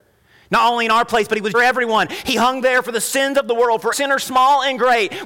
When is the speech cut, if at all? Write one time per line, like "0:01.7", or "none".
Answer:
0:01.5
0:03.9